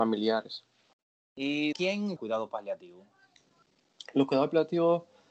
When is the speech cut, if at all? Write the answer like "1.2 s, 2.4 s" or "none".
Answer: 1.7 s, 2.2 s

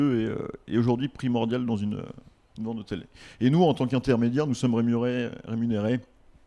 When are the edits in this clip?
none

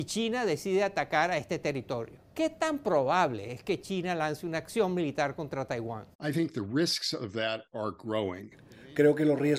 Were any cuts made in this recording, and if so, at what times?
2.2 s, 6.1 s

